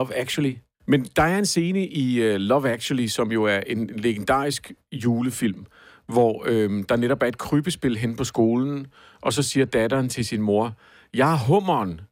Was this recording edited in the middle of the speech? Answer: no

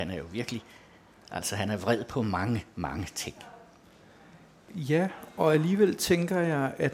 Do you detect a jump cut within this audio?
no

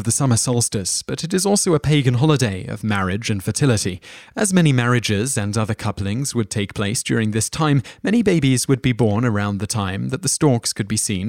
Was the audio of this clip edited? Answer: no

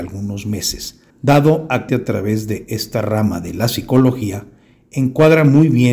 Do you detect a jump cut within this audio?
yes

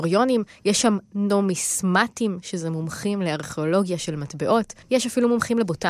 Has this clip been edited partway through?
yes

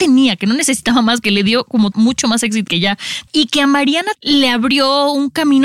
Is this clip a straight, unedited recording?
no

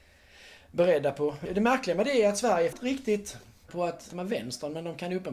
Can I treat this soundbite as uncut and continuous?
no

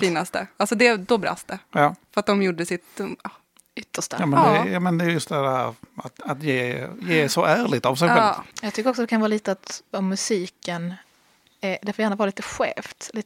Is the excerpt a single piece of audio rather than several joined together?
no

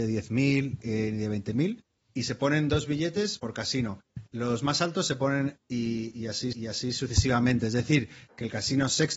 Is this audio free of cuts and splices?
no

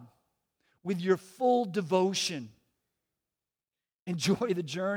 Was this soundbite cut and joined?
no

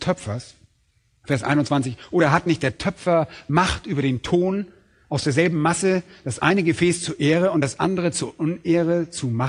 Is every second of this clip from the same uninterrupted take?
yes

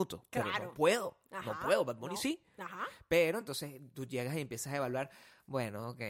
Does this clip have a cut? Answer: no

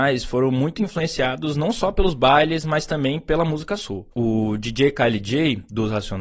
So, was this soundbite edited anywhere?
yes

